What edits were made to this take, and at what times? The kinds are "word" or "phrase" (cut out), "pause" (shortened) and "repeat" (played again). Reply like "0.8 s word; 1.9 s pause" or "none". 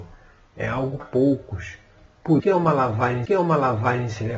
1.0 s word; 2.4 s word; 3.3 s repeat